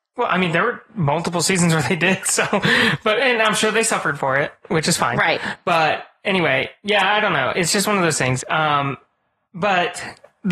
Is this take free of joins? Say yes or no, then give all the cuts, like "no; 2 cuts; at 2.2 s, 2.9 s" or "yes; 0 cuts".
yes; 0 cuts